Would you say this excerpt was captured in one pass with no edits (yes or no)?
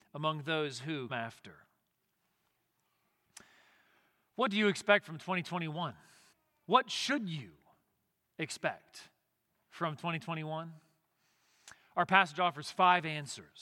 no